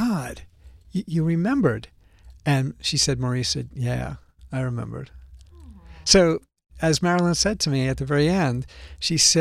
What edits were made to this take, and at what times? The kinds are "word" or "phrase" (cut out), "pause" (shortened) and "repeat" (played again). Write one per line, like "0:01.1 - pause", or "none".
none